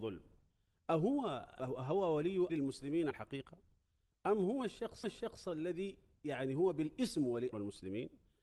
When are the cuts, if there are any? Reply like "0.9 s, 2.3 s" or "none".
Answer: 1.6 s, 2.5 s, 3.1 s, 5.0 s, 7.5 s